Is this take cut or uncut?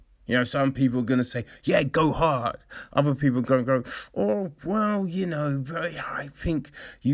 uncut